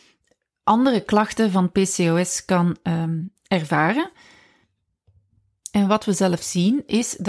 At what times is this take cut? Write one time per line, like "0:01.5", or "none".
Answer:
none